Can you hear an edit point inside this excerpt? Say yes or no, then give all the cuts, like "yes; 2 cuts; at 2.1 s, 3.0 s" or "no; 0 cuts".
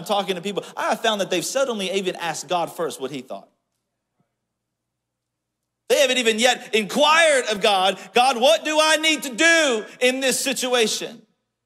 no; 0 cuts